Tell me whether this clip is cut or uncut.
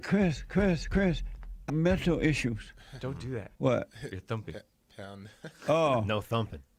cut